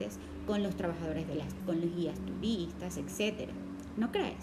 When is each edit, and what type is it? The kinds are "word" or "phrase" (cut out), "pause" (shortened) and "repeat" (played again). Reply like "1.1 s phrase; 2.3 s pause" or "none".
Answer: 1.6 s word